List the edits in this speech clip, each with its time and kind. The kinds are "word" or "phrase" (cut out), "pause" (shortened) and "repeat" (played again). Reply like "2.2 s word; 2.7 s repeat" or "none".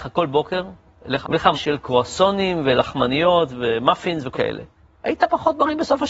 1.2 s word; 1.5 s word; 4.3 s word; 4.8 s pause

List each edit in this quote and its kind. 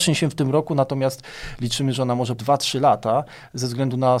2.4 s word

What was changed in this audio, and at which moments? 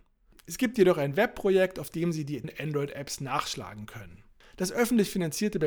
2.4 s word

